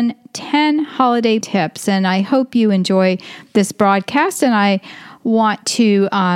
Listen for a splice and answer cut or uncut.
cut